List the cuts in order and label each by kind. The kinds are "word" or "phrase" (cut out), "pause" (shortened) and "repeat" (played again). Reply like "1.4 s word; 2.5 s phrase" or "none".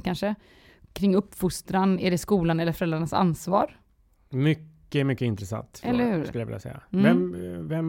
none